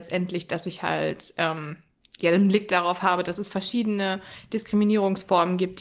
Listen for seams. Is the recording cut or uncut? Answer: uncut